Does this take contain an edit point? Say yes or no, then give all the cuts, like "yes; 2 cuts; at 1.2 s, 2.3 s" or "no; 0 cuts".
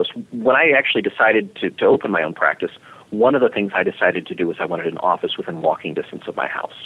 no; 0 cuts